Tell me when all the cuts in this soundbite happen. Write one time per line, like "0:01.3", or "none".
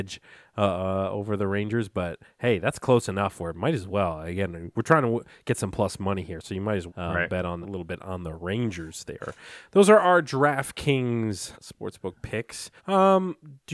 0:06.9
0:07.6
0:11.5
0:12.8